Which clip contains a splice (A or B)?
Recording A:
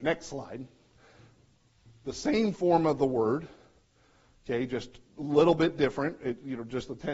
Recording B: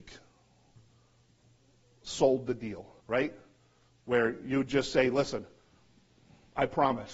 B